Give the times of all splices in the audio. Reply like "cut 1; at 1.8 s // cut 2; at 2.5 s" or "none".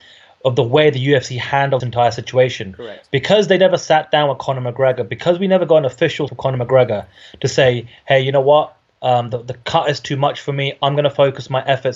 cut 1; at 1.8 s // cut 2; at 6.3 s

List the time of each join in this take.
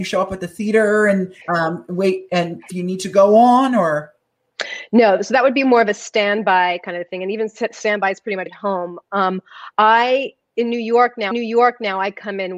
cut 1; at 1.4 s // cut 2; at 2.7 s // cut 3; at 8.5 s // cut 4; at 11.3 s

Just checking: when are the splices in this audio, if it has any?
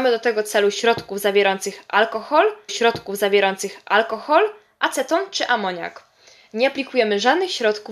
cut 1; at 2.7 s

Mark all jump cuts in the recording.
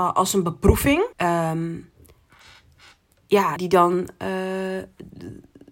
cut 1; at 1.1 s // cut 2; at 3.6 s

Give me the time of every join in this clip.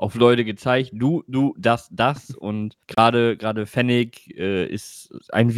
cut 1; at 2.8 s

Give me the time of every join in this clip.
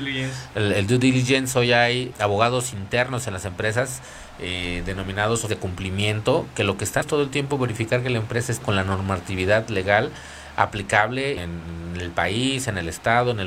cut 1; at 2.1 s // cut 2; at 5.5 s // cut 3; at 7.0 s // cut 4; at 8.6 s // cut 5; at 11.4 s

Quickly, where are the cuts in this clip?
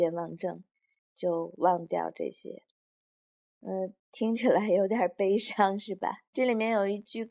cut 1; at 2.7 s // cut 2; at 4.0 s // cut 3; at 6.3 s

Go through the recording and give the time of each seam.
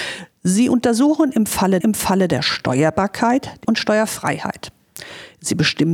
cut 1; at 1.8 s // cut 2; at 3.6 s

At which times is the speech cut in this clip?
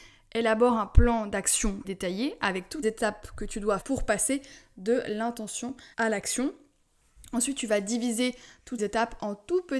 cut 1; at 1.8 s // cut 2; at 2.8 s // cut 3; at 3.8 s // cut 4; at 5.9 s // cut 5; at 8.8 s

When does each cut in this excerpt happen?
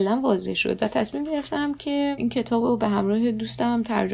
none

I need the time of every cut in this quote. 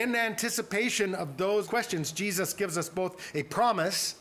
cut 1; at 1.6 s

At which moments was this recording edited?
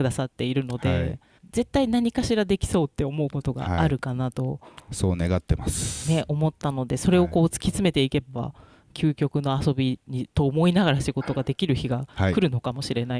cut 1; at 1.4 s // cut 2; at 10.3 s

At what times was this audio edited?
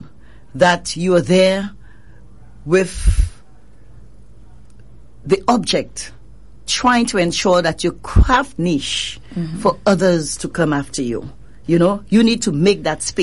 cut 1; at 6.7 s // cut 2; at 8.6 s

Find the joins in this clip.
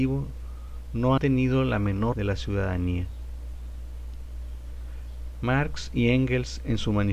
cut 1; at 1.2 s // cut 2; at 2.1 s

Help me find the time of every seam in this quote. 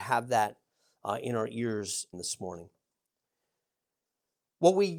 cut 1; at 2.1 s

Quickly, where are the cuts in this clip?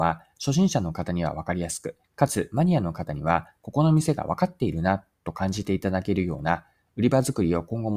cut 1; at 2.0 s

